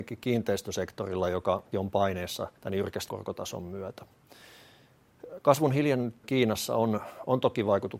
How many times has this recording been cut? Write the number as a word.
four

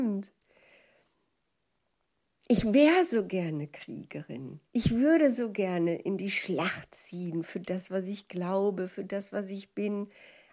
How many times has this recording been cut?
one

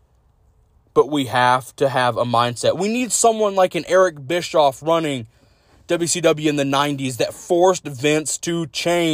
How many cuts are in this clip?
zero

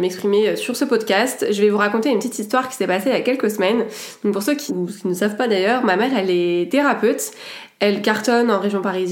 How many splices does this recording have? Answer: one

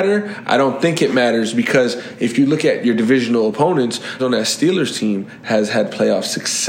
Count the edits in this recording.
one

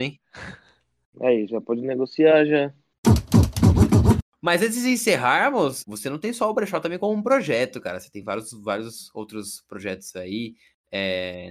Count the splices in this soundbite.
zero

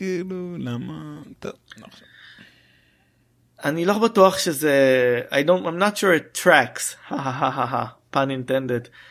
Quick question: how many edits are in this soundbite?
zero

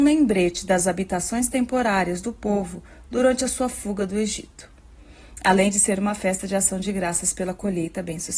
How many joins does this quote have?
zero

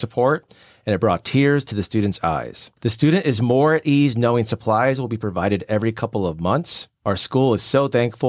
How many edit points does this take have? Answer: two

